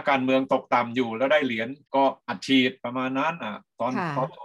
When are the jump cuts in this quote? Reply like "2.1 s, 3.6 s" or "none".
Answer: 1.8 s